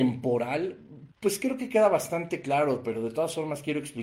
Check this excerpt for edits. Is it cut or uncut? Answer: cut